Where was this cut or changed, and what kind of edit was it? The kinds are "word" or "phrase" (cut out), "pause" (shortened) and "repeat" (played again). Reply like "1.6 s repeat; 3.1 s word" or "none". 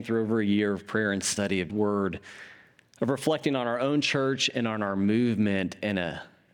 1.7 s word